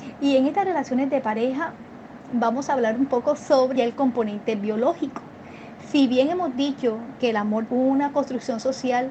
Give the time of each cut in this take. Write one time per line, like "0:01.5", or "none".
0:03.8
0:07.7